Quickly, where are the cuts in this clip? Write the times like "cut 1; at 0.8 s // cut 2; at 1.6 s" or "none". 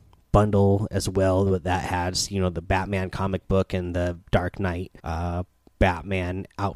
cut 1; at 5.0 s